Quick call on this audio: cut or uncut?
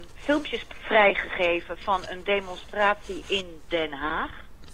uncut